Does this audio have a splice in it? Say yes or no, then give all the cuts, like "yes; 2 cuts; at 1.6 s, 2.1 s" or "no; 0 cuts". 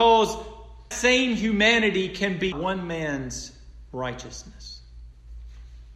yes; 2 cuts; at 0.9 s, 2.5 s